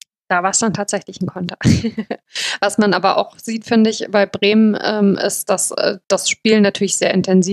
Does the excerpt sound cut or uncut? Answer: uncut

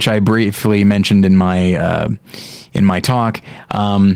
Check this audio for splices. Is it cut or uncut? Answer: uncut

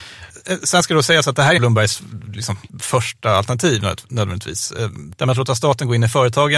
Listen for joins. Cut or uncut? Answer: cut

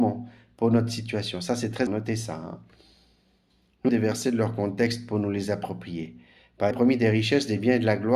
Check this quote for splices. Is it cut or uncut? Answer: cut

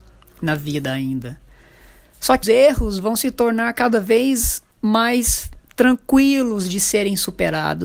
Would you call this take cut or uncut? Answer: cut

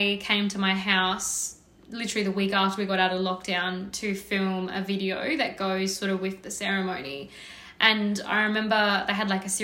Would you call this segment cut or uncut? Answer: uncut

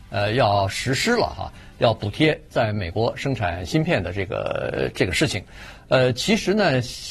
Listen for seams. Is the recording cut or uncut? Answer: uncut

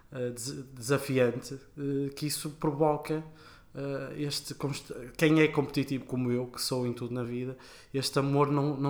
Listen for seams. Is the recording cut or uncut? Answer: uncut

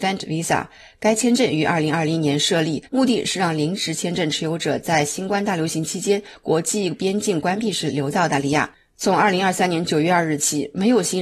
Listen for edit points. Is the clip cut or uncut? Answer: cut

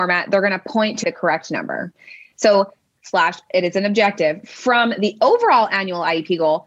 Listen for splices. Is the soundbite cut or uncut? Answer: cut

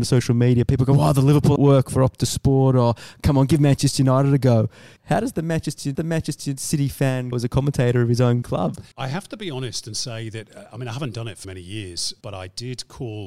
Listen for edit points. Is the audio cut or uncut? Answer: cut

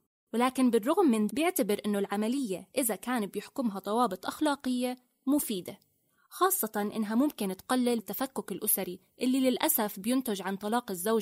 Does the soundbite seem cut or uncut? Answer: cut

